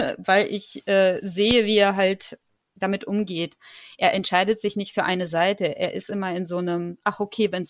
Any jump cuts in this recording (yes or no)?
no